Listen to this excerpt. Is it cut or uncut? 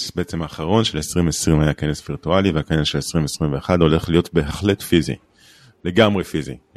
uncut